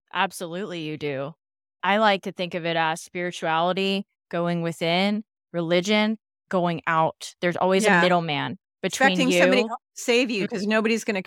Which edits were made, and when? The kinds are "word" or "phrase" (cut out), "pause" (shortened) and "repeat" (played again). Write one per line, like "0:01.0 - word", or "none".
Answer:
none

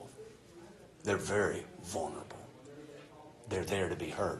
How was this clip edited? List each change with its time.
none

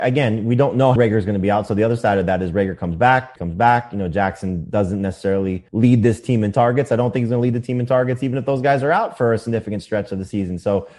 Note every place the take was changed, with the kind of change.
0:01.0 - phrase
0:03.4 - word
0:05.7 - pause

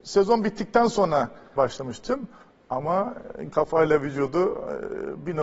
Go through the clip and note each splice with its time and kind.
0:01.6 - word
0:03.5 - phrase

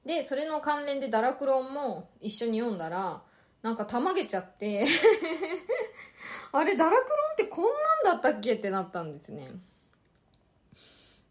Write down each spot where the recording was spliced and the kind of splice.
none

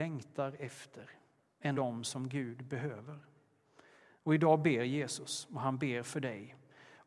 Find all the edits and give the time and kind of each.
0:01.7 - word

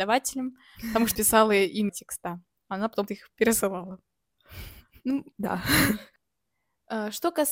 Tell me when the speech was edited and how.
0:01.1 - word
0:01.9 - word
0:03.1 - word
0:05.3 - pause

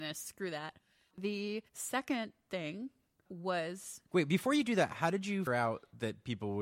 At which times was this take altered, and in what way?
0:01.7 - pause
0:05.5 - word

